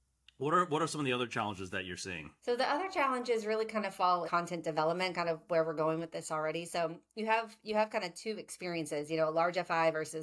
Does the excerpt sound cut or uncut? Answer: cut